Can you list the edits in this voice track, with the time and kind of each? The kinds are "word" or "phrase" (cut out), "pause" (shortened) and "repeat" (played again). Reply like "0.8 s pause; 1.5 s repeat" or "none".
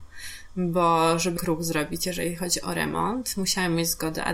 1.4 s word